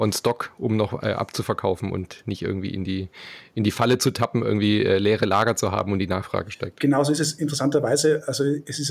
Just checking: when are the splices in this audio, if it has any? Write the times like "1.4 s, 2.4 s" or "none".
none